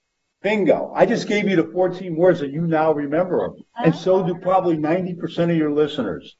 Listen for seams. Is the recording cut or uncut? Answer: uncut